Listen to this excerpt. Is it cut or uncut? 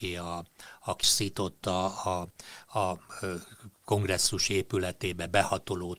cut